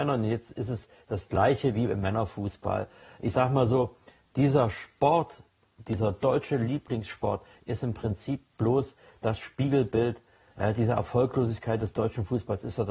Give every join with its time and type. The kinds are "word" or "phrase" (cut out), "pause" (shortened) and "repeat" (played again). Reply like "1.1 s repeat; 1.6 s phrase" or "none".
none